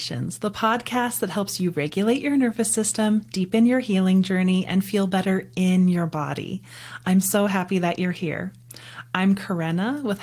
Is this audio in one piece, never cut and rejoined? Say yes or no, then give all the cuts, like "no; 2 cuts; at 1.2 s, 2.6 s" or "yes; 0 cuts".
yes; 0 cuts